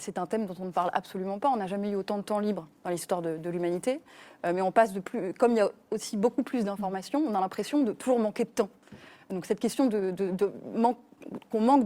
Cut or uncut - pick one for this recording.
uncut